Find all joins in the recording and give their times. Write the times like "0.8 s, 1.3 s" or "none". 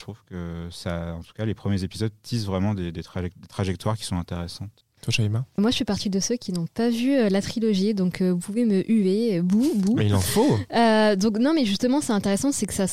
4.8 s, 5.6 s